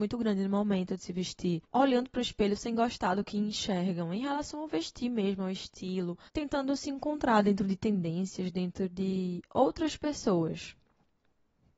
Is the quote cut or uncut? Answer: cut